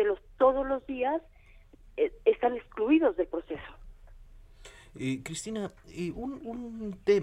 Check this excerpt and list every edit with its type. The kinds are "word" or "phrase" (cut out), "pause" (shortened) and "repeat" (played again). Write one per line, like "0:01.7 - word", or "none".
none